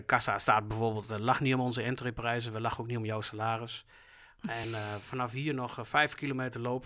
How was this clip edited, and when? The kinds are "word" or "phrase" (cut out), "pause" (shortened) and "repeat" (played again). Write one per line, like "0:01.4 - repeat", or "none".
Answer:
none

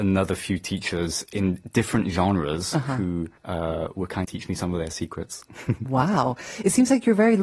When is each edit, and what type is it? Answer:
0:03.4 - pause
0:04.2 - phrase

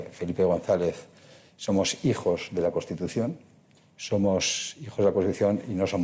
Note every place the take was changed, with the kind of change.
0:03.9 - word

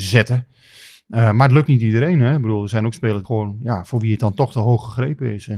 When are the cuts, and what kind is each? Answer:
0:01.7 - word
0:03.2 - word

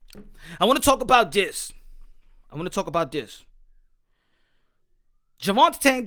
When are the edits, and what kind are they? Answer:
none

